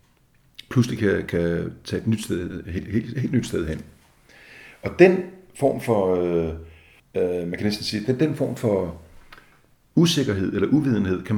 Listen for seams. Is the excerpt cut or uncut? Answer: uncut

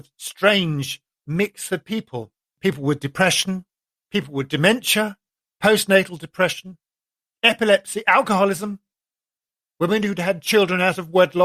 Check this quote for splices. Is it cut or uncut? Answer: uncut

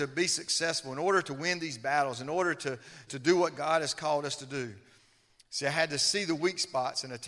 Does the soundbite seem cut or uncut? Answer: cut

